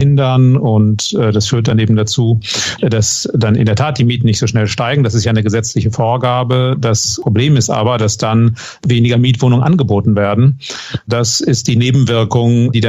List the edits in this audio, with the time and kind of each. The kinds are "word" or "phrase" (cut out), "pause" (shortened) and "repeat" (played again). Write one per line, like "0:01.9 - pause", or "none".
none